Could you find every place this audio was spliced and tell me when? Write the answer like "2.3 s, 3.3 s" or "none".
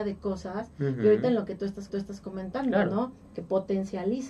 1.9 s